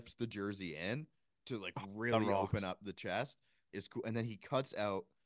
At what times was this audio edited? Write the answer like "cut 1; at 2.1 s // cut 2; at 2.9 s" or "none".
none